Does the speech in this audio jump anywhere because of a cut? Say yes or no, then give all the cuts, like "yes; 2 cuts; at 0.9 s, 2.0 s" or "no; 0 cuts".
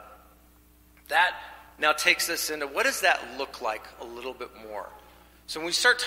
no; 0 cuts